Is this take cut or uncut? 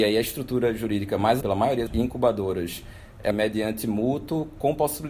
cut